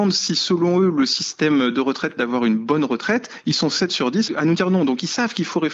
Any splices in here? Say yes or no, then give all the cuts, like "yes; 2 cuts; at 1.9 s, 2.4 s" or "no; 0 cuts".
yes; 2 cuts; at 2.2 s, 4.3 s